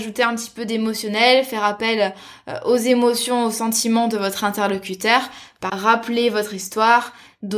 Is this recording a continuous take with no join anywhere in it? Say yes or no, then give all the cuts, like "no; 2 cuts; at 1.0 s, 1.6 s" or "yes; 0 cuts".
no; 1 cut; at 5.7 s